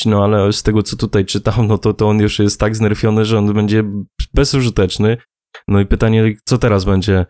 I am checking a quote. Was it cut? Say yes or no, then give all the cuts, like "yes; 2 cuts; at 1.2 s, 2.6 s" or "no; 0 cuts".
no; 0 cuts